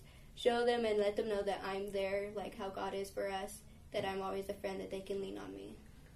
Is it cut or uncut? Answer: uncut